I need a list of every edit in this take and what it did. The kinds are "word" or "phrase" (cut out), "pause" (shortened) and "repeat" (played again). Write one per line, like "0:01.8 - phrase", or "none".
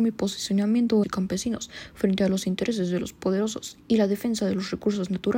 0:01.0 - phrase

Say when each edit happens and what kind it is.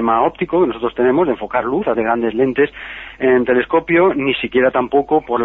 0:01.9 - word

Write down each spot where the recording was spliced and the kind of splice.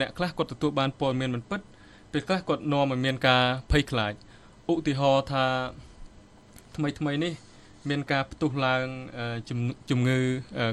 none

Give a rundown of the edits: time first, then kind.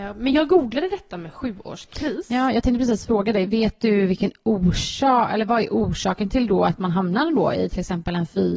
none

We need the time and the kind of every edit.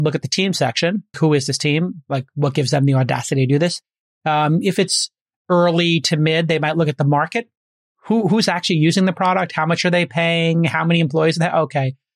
0:01.1 - word

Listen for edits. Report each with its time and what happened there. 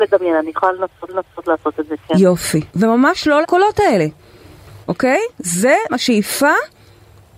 0:01.1 - repeat
0:02.7 - pause
0:03.4 - word
0:04.8 - pause
0:05.9 - word

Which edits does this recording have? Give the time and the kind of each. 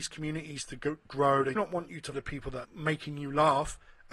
0:01.1 - word
0:01.6 - word
0:02.1 - word
0:02.6 - word

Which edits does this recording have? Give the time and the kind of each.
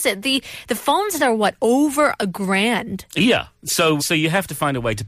0:01.2 - word
0:04.0 - word

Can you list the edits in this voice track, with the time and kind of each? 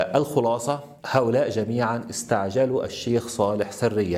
0:01.0 - pause

